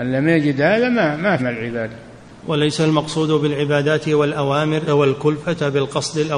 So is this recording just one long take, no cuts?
no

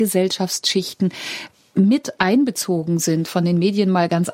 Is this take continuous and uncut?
yes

